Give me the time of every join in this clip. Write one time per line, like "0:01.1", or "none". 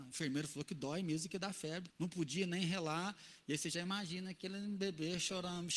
0:01.9

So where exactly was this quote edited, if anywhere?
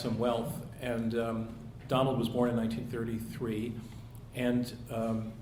none

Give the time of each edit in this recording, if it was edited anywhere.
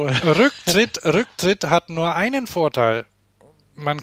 none

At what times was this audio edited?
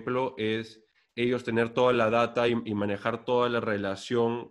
none

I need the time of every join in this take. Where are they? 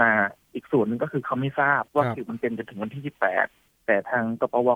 0:01.9

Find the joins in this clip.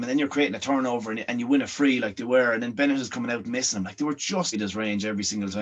0:03.4
0:04.5

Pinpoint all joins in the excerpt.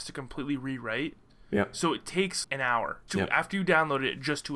0:02.4
0:03.1

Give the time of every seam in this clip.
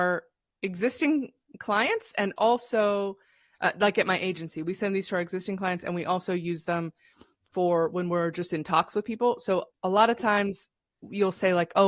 0:09.7

